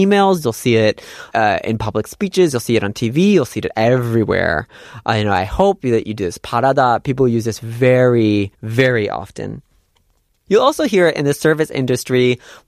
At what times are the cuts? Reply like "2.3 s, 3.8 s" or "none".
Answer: 1.3 s, 8.5 s